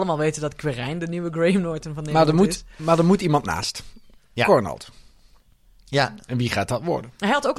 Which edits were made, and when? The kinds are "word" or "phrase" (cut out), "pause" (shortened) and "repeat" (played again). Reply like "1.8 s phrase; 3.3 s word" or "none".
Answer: none